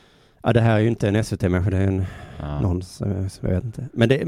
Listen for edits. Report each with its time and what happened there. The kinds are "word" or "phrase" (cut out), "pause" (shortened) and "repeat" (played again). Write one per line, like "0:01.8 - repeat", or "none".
none